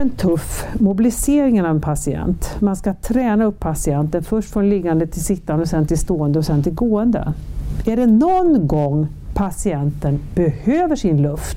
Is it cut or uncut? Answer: uncut